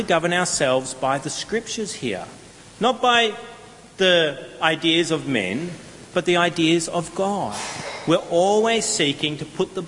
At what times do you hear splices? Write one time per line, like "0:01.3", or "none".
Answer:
none